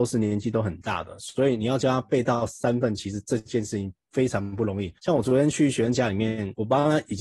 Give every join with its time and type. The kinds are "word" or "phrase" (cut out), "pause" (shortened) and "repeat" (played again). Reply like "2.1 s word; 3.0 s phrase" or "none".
5.0 s pause